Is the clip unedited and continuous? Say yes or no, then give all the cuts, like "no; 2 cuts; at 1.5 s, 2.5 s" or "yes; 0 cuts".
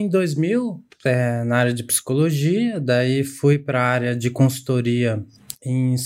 yes; 0 cuts